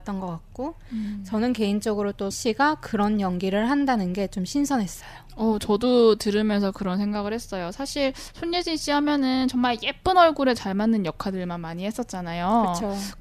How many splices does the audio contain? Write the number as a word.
one